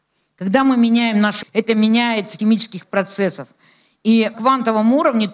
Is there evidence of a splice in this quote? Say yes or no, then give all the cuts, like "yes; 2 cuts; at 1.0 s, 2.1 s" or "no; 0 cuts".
yes; 3 cuts; at 1.4 s, 2.4 s, 4.3 s